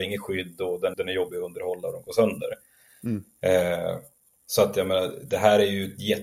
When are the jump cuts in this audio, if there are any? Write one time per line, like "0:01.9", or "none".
0:00.9

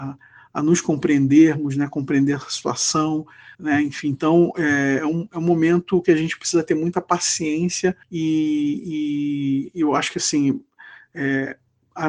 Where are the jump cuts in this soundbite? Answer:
0:03.5
0:08.0

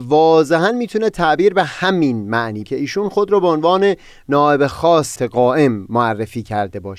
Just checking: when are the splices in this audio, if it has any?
0:02.6
0:05.2

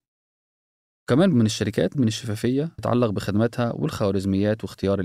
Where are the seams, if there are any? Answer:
0:01.3
0:01.9
0:02.8

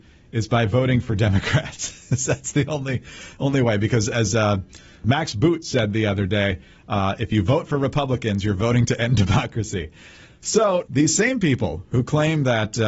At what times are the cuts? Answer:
0:10.8

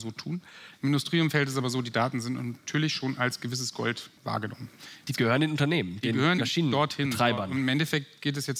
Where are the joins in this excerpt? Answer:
0:04.2
0:06.4

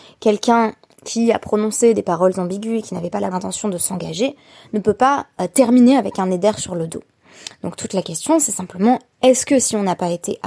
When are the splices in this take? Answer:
0:03.3

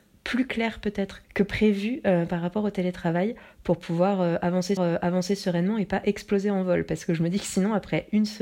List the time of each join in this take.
0:01.2
0:04.8

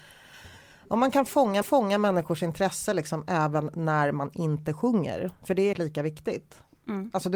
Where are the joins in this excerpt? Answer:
0:01.6
0:05.7

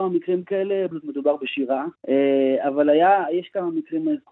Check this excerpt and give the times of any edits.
0:00.9
0:02.0

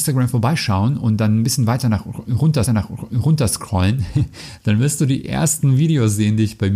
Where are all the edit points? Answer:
0:02.7

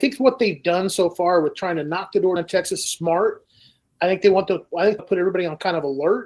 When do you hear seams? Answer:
0:02.4
0:02.9
0:05.0

